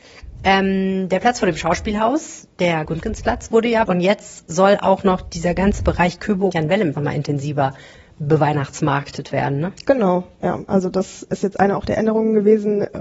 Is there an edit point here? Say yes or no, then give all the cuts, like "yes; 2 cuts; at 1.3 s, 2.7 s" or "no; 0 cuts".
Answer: yes; 5 cuts; at 2.8 s, 3.8 s, 6.5 s, 6.9 s, 11.3 s